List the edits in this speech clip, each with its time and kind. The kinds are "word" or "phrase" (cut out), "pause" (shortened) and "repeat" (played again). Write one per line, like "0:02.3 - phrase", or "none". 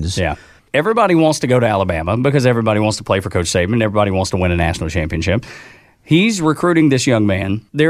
none